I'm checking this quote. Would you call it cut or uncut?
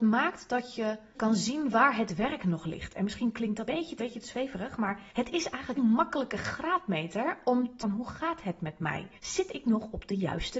cut